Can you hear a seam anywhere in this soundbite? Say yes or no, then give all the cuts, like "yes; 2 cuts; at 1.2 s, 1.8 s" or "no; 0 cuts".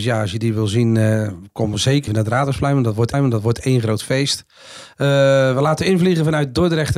yes; 2 cuts; at 2.1 s, 3.1 s